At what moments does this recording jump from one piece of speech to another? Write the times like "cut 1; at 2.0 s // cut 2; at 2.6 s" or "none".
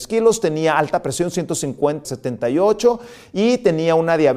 cut 1; at 2.0 s